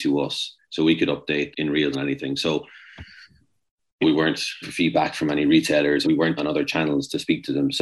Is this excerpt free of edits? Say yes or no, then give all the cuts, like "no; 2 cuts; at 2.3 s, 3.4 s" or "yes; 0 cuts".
no; 6 cuts; at 1.5 s, 1.9 s, 4.0 s, 4.6 s, 6.0 s, 6.4 s